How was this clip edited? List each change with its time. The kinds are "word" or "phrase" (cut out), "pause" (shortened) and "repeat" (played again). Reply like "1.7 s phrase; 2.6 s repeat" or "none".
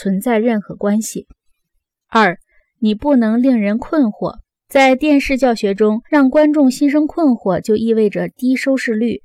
6.1 s pause